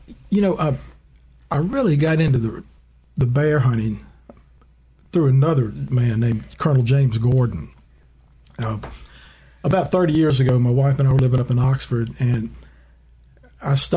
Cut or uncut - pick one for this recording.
uncut